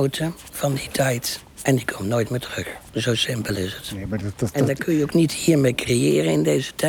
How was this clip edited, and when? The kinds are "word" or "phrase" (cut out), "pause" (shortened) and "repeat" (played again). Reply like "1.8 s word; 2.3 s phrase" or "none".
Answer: 1.5 s pause; 4.5 s word

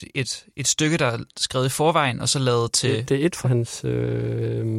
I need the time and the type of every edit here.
3.4 s phrase

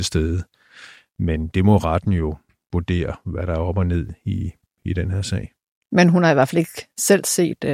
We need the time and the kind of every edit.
none

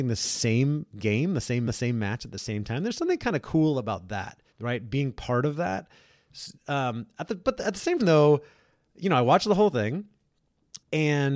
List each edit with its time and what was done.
1.7 s repeat; 4.5 s pause; 8.0 s word

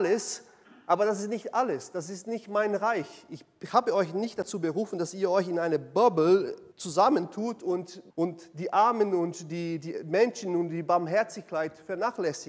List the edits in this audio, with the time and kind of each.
6.7 s pause; 8.1 s pause

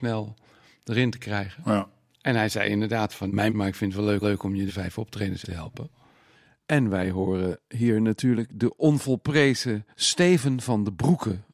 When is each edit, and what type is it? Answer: 2.1 s pause; 3.5 s phrase; 4.2 s repeat; 4.7 s word; 5.4 s word; 9.9 s pause

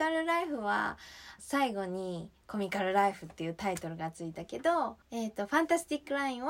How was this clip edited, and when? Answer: 1.4 s phrase; 5.0 s pause

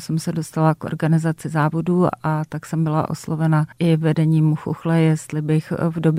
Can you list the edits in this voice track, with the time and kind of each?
3.7 s pause

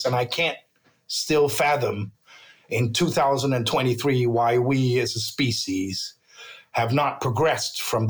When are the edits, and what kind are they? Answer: none

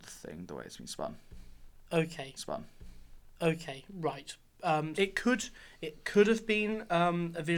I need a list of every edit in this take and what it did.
2.4 s repeat; 4.9 s word

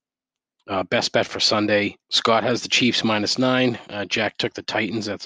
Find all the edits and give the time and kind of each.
2.0 s pause

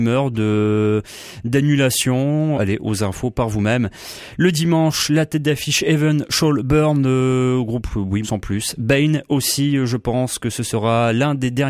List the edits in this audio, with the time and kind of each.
2.5 s word; 8.2 s word

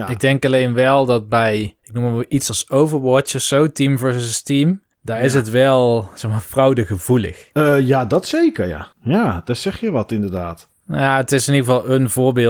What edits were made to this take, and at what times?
1.8 s pause; 8.9 s pause

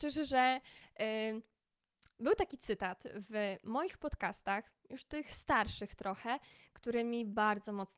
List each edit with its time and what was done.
none

